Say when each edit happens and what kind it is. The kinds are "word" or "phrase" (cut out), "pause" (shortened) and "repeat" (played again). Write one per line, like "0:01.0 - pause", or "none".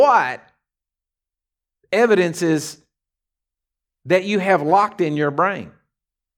none

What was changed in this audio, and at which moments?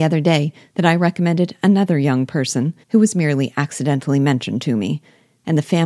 0:02.8 - pause

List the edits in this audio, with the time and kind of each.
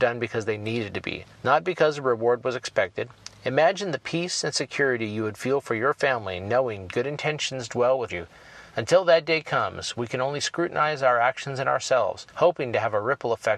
0:01.3 - pause
0:08.1 - phrase
0:08.7 - pause
0:12.3 - pause

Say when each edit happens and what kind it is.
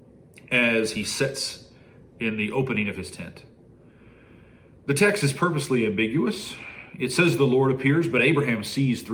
none

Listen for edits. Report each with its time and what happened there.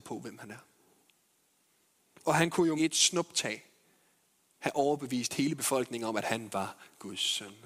0:02.8 - word

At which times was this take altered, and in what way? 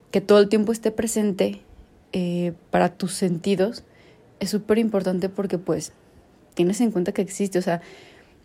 none

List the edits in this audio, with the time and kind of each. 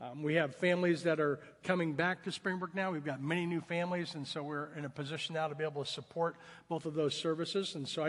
none

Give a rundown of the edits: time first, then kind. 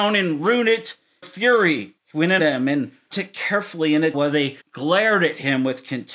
0:01.2 - phrase
0:02.0 - pause
0:02.4 - word
0:03.1 - word
0:04.1 - word
0:04.6 - pause

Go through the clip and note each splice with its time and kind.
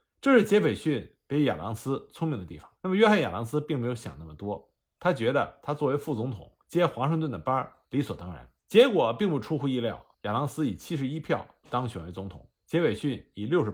0:02.8 - pause
0:06.6 - pause
0:07.8 - pause
0:08.6 - pause
0:10.1 - pause
0:12.6 - pause

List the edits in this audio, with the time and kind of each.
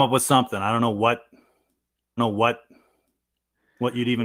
0:02.2 - repeat

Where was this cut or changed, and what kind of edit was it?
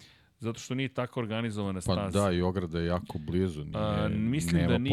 none

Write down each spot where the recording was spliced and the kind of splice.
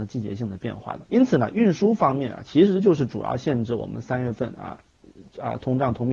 0:01.1 - pause

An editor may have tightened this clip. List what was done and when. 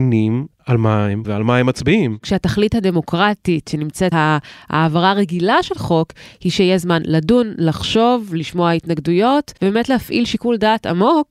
0:01.2 - word
0:04.1 - word
0:09.6 - pause

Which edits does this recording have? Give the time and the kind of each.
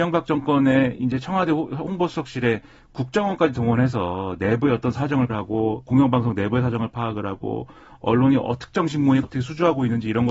0:05.3 - word
0:09.2 - word

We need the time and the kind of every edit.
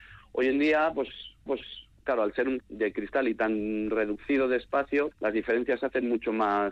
0:01.5 - repeat
0:02.6 - word
0:05.1 - word

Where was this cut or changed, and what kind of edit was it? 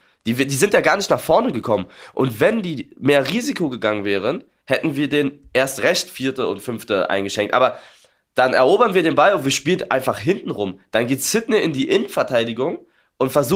none

